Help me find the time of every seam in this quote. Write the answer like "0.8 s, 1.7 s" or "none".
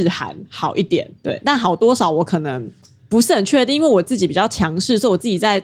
1.2 s